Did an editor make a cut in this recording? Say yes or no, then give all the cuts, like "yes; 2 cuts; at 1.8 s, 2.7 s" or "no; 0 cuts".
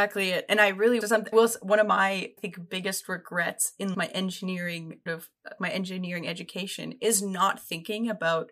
yes; 6 cuts; at 1.0 s, 1.3 s, 2.4 s, 3.9 s, 5.1 s, 5.6 s